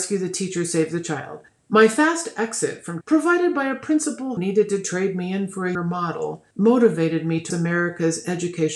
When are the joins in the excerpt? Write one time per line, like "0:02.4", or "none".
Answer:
0:01.5
0:03.0
0:04.4
0:05.7
0:06.5
0:07.5